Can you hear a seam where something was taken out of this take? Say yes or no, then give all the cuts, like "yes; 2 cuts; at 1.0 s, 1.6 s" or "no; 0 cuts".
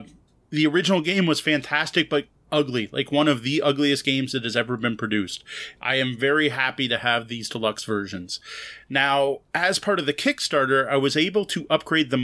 no; 0 cuts